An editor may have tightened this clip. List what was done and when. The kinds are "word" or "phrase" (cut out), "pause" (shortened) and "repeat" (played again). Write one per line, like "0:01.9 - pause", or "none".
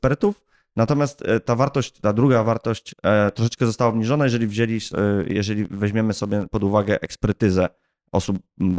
none

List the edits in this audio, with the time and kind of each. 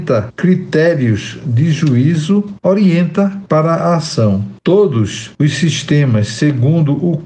none

